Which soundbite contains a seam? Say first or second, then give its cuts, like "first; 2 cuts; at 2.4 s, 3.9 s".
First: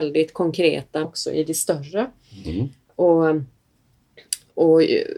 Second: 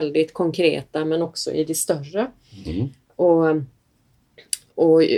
first; 1 cut; at 1.0 s